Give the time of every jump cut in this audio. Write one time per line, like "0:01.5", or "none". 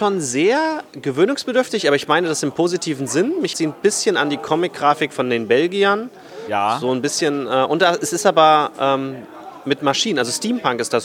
0:03.5